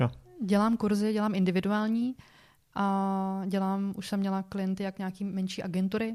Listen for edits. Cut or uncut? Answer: uncut